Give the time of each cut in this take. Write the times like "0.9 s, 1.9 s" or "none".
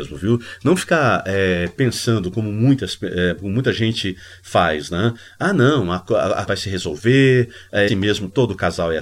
6.5 s, 7.9 s